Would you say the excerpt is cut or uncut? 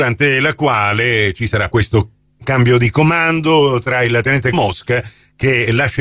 cut